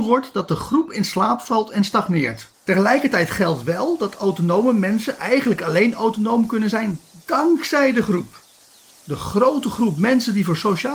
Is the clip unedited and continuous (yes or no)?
no